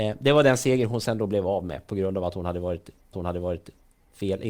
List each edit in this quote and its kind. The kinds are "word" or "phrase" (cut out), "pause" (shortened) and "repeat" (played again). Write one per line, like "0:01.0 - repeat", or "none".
0:03.1 - repeat